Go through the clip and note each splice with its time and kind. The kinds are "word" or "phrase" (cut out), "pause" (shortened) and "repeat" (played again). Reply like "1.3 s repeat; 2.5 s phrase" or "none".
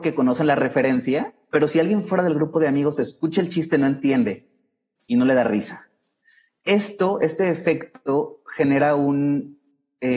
none